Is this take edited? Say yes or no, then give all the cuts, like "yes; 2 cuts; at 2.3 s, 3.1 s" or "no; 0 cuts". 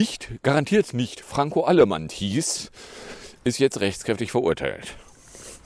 no; 0 cuts